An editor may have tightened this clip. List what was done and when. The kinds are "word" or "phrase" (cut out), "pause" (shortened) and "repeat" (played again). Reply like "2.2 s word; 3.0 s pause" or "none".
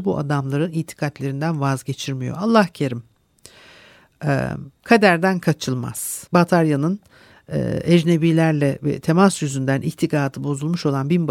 4.7 s pause; 6.3 s pause